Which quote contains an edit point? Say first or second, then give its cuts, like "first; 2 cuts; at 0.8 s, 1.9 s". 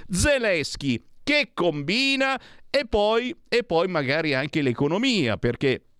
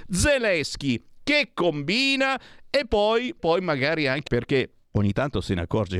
second; 3 cuts; at 3.4 s, 4.3 s, 4.8 s